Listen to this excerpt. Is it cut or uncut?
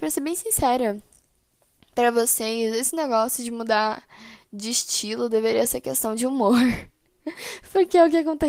uncut